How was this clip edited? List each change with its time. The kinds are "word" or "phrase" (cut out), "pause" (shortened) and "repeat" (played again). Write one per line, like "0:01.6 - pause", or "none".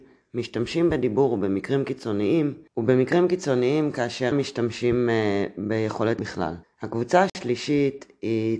0:02.7 - pause
0:04.3 - phrase
0:06.2 - word
0:06.6 - pause